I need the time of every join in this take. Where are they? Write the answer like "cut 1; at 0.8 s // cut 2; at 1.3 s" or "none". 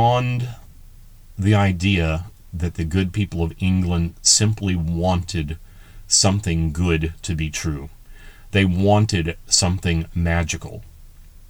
none